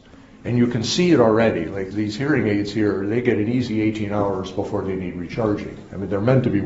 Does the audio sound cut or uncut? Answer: cut